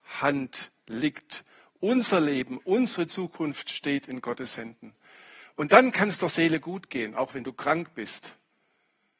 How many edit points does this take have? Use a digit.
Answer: 0